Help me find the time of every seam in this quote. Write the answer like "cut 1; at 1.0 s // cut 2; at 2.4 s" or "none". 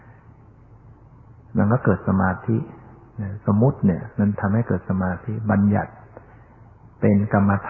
cut 1; at 4.1 s